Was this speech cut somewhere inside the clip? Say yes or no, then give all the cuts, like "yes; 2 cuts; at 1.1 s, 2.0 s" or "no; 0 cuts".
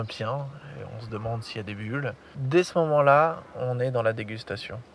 no; 0 cuts